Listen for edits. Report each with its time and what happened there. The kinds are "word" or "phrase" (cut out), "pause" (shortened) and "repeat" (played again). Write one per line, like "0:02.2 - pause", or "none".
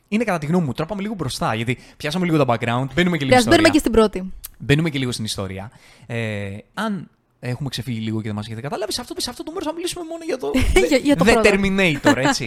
0:02.9 - word
0:03.3 - word
0:06.7 - word
0:09.2 - repeat